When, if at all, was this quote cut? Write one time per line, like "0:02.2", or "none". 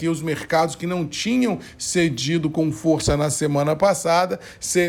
none